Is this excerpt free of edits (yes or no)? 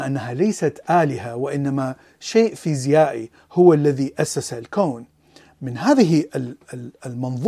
yes